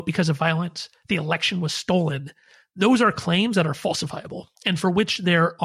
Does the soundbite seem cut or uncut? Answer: uncut